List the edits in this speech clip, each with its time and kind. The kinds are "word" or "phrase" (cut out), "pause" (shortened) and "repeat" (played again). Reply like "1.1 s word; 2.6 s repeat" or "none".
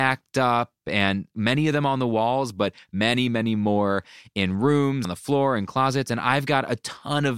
5.0 s word